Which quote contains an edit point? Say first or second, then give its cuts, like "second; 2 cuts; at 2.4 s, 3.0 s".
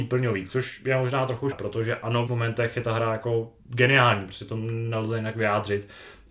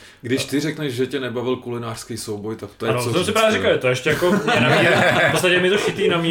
first; 3 cuts; at 1.5 s, 2.3 s, 3.6 s